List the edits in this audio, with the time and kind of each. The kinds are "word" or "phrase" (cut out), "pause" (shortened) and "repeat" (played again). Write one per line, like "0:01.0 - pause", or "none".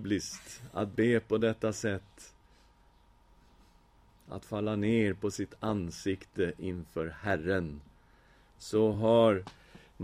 none